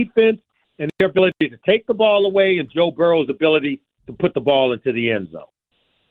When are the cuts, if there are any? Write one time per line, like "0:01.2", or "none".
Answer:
none